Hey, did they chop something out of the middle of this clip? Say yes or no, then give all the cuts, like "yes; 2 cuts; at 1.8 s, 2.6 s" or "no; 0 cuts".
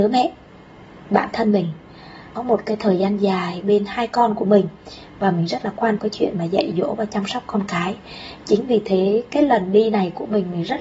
yes; 2 cuts; at 2.4 s, 6.0 s